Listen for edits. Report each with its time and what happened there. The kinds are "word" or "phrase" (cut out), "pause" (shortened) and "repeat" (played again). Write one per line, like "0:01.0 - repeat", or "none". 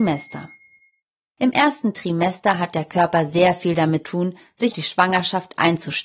0:04.0 - word
0:04.7 - word